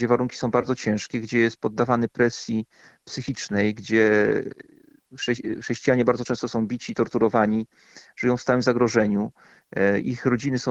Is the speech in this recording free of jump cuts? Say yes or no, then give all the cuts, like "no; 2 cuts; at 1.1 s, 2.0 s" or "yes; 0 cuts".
yes; 0 cuts